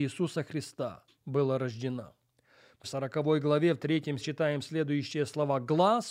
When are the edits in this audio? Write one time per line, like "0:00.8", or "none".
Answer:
0:01.1
0:02.8
0:04.2

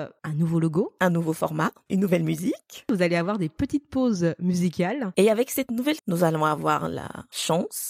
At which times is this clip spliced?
0:06.0

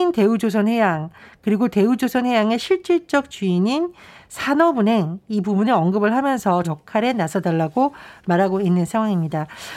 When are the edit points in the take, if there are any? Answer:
0:06.6

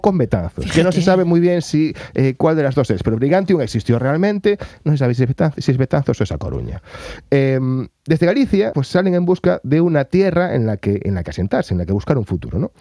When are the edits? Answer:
0:08.7

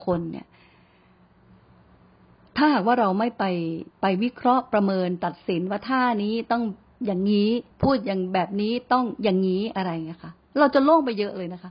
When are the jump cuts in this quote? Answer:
0:03.9
0:06.9
0:07.7

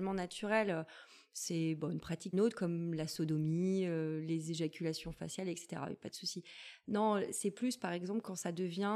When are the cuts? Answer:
0:02.3

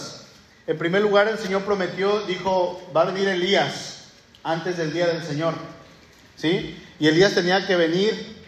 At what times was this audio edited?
none

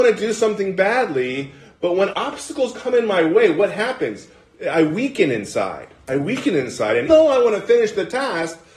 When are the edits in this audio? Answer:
0:02.1
0:07.1

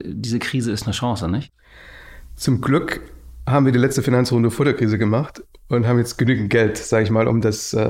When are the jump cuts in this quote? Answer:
none

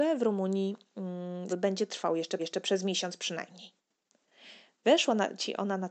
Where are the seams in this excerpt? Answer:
0:01.5
0:02.4

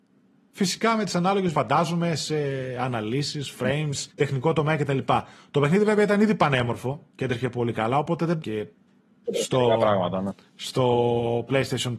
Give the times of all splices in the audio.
0:01.5
0:04.1
0:07.1
0:08.4
0:09.3

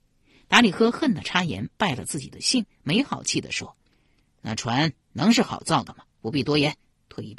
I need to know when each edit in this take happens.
0:03.9
0:05.0
0:06.1

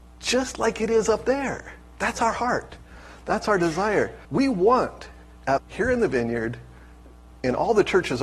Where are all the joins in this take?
0:04.2
0:05.6

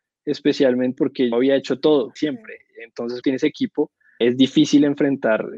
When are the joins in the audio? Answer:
0:01.0
0:01.3
0:02.2
0:03.2
0:04.2

